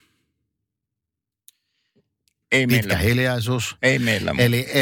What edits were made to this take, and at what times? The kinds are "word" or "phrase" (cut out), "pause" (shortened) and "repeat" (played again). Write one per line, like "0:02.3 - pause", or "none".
none